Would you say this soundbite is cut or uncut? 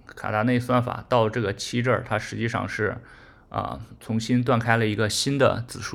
uncut